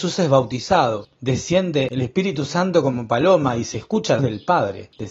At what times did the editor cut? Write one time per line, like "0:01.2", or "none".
0:04.2